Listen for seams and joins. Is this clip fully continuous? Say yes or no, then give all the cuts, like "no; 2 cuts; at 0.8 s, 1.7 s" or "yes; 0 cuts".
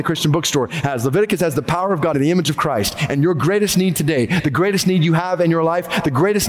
no; 1 cut; at 2.1 s